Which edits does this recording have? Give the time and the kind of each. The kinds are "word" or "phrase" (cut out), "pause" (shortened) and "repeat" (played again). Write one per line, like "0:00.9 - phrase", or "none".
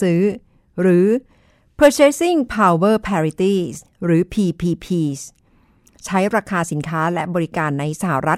none